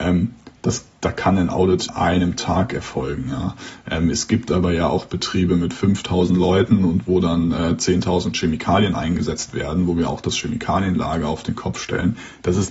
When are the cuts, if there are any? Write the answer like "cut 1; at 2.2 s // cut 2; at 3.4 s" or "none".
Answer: cut 1; at 1.9 s